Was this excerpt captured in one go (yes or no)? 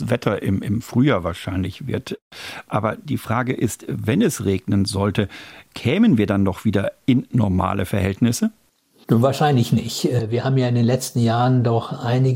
yes